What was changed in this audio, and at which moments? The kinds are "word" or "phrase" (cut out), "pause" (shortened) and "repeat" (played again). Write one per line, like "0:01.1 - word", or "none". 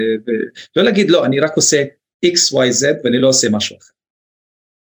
none